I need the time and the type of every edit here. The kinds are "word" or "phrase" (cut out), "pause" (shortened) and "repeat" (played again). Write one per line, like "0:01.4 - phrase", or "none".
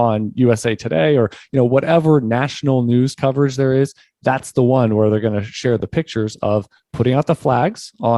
none